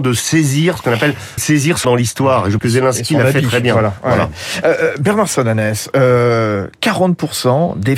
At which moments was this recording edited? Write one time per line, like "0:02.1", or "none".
0:01.4
0:01.8
0:02.6